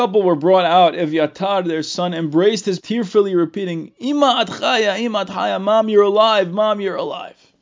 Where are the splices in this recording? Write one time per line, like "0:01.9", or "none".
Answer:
0:02.8